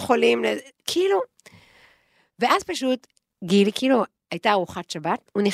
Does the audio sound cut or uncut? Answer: uncut